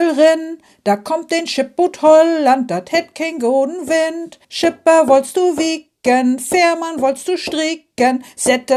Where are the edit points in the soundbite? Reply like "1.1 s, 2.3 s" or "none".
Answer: 4.4 s